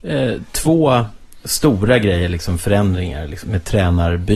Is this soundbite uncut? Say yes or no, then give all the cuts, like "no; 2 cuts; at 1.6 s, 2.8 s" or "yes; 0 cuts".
no; 1 cut; at 3.4 s